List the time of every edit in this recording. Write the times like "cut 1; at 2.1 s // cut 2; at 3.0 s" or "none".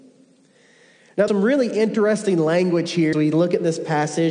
cut 1; at 1.3 s // cut 2; at 3.1 s